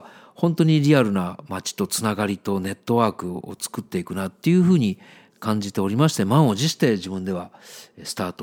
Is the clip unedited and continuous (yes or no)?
yes